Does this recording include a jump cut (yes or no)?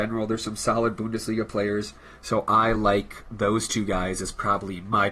no